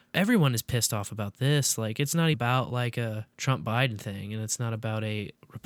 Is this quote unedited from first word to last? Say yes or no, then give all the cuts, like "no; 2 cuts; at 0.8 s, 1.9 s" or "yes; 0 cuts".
no; 2 cuts; at 2.3 s, 3.3 s